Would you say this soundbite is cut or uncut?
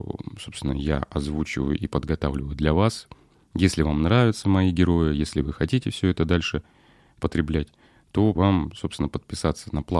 cut